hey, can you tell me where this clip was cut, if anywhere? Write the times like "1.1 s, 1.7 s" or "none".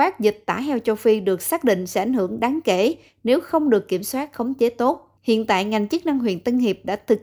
5.2 s